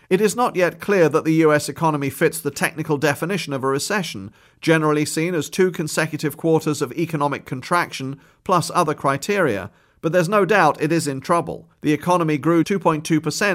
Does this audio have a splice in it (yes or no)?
yes